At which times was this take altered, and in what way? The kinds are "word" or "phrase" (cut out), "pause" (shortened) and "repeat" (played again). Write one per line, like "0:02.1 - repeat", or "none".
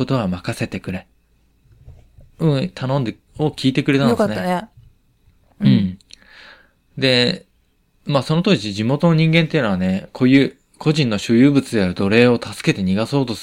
0:03.3 - pause